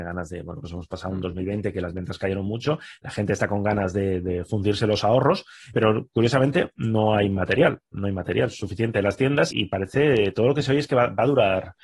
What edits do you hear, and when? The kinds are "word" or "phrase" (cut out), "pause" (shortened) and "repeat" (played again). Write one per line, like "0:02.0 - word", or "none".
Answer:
0:05.7 - word
0:09.5 - word